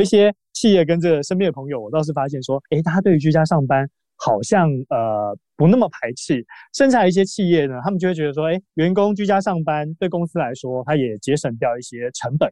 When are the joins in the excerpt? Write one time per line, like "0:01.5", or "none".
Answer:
0:02.7
0:08.7